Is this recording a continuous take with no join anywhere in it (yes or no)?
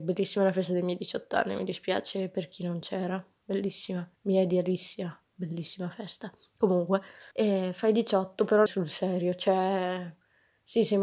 no